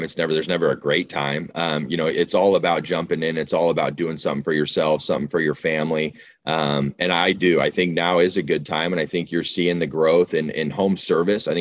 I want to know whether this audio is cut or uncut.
uncut